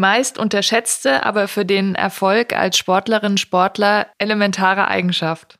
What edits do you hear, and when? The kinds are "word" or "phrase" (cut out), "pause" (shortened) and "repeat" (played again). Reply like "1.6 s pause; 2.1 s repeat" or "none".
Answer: none